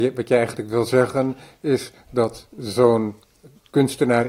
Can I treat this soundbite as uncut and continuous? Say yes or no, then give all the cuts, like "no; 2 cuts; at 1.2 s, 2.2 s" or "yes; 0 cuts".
yes; 0 cuts